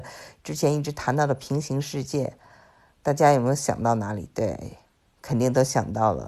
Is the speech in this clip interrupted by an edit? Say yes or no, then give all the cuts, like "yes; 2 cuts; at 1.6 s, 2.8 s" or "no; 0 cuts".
no; 0 cuts